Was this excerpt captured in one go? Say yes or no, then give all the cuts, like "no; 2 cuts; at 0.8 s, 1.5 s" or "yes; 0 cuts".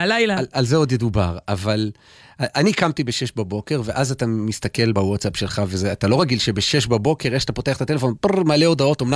no; 1 cut; at 4.9 s